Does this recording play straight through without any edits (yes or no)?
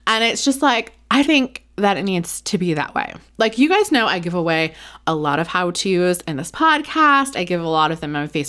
no